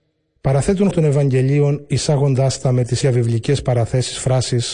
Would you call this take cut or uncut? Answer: cut